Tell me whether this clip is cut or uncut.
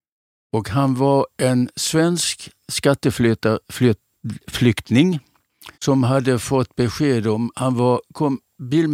cut